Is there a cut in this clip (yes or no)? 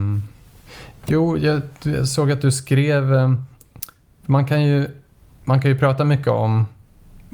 no